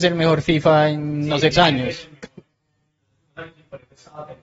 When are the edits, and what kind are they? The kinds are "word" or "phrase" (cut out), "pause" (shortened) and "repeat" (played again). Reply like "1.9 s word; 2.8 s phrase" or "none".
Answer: 1.5 s word